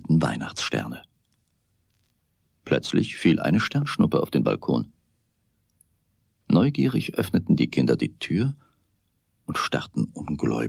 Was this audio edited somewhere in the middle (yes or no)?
no